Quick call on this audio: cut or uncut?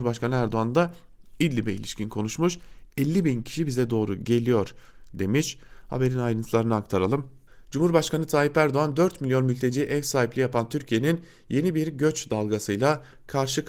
uncut